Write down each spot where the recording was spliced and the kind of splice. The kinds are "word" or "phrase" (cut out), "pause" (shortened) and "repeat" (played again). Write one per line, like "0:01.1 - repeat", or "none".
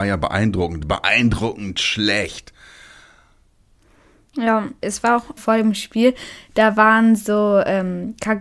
0:05.4 - phrase